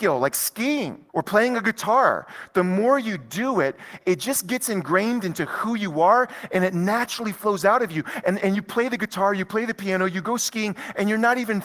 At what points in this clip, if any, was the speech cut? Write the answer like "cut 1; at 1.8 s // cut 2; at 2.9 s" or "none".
cut 1; at 1.1 s

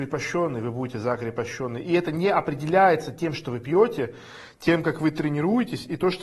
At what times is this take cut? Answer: none

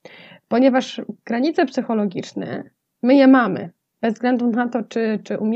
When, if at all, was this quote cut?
none

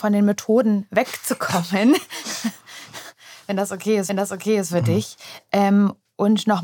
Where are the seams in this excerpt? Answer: cut 1; at 4.1 s

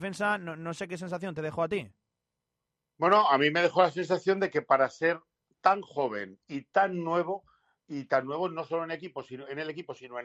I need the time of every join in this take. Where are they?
none

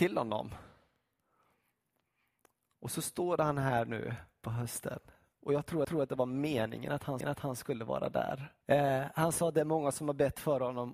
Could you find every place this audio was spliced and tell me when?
cut 1; at 5.8 s // cut 2; at 7.2 s // cut 3; at 8.6 s

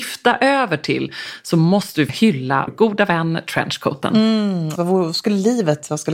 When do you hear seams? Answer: cut 1; at 2.1 s // cut 2; at 2.7 s // cut 3; at 4.8 s

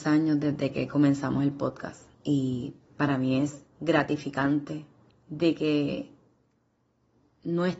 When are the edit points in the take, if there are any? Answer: cut 1; at 2.1 s // cut 2; at 3.7 s // cut 3; at 5.1 s

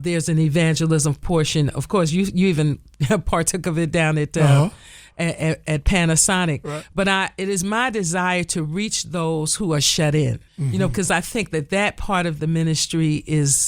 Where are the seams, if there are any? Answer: cut 1; at 10.5 s

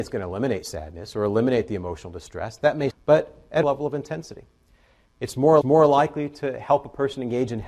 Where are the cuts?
cut 1; at 2.9 s // cut 2; at 3.6 s // cut 3; at 5.6 s

